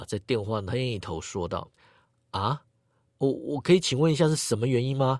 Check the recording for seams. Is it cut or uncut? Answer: cut